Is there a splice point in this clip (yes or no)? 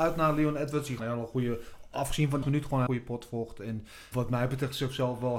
yes